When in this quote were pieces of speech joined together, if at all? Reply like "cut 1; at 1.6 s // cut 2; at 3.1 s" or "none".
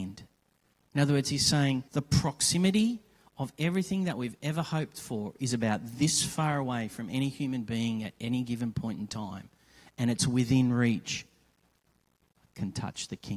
cut 1; at 1.9 s